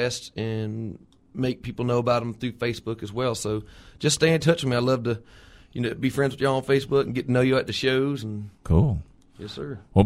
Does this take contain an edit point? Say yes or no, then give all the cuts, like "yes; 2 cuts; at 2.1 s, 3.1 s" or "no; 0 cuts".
no; 0 cuts